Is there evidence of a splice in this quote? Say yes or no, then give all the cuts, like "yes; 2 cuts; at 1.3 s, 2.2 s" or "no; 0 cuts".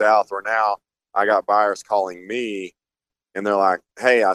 no; 0 cuts